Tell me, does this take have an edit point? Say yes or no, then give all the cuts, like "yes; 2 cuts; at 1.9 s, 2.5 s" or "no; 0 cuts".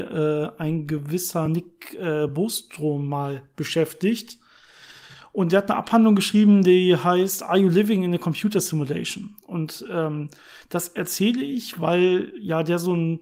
no; 0 cuts